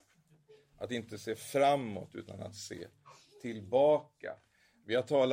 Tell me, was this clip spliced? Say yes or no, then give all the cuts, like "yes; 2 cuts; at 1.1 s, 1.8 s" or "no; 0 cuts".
no; 0 cuts